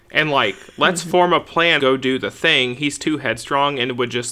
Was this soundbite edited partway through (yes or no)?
yes